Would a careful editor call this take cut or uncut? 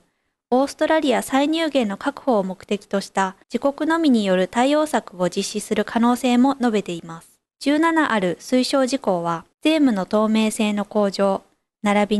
cut